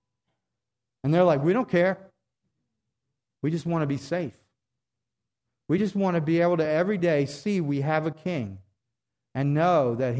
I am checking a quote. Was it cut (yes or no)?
no